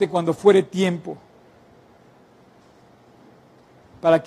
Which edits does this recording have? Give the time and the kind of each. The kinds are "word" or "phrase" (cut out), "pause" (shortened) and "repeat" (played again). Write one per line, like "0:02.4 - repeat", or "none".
none